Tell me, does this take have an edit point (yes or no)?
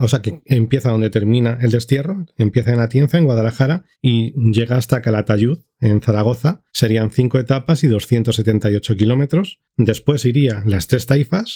yes